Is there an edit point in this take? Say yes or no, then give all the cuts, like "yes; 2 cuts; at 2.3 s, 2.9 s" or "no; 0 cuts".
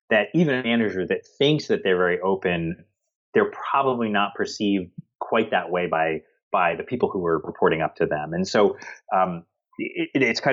no; 0 cuts